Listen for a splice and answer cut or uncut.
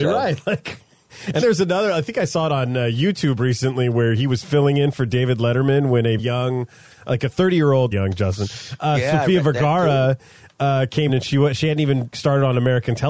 cut